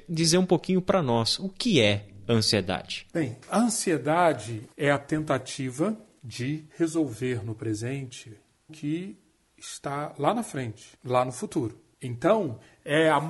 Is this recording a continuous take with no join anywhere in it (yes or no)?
no